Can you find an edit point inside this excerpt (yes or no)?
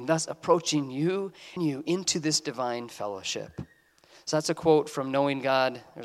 yes